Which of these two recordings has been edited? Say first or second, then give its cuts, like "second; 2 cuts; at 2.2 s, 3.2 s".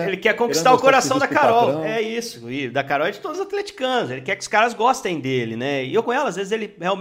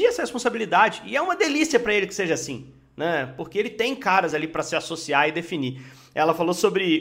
first; 1 cut; at 6.0 s